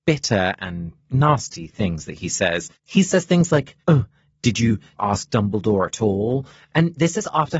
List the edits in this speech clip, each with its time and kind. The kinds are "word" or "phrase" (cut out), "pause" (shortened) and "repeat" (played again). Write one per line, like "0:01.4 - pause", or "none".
0:02.7 - pause
0:03.8 - pause
0:05.0 - phrase